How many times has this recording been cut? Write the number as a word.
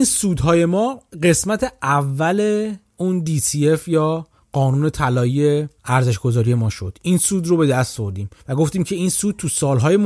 two